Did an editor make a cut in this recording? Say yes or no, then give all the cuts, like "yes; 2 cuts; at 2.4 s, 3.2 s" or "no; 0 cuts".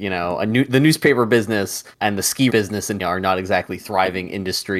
yes; 3 cuts; at 2.0 s, 2.5 s, 3.0 s